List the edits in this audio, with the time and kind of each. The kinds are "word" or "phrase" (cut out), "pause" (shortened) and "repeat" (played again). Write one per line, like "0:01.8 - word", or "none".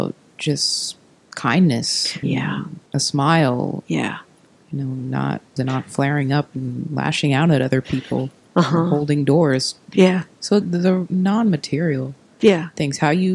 0:02.2 - word
0:02.9 - pause
0:03.8 - word
0:05.6 - phrase
0:10.6 - word